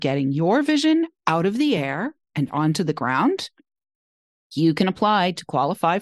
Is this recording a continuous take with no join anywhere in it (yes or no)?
yes